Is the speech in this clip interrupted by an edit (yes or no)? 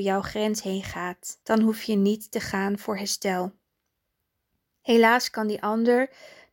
yes